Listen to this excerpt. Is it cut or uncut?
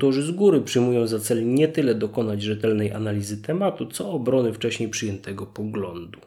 uncut